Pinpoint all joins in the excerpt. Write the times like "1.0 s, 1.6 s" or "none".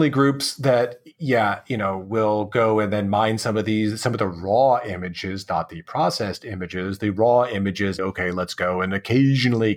8.0 s